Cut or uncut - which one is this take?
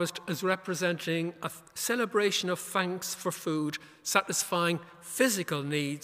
uncut